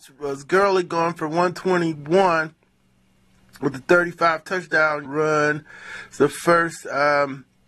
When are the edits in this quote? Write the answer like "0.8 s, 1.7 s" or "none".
5.0 s